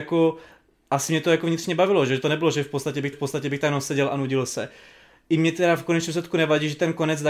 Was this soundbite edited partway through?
yes; 1 cut; at 3.1 s

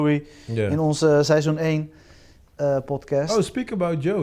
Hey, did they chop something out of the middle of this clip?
no; 0 cuts

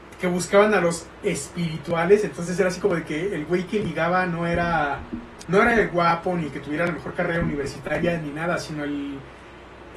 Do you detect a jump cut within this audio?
no; 0 cuts

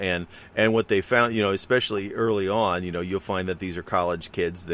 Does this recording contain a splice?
no; 0 cuts

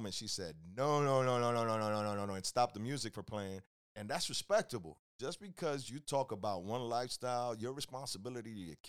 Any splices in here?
yes; 1 cut; at 3.8 s

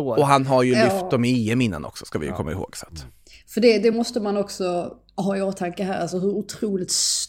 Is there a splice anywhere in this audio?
no; 0 cuts

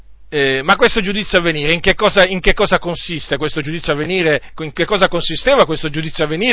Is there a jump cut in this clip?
no; 0 cuts

